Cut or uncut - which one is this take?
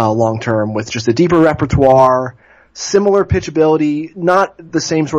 uncut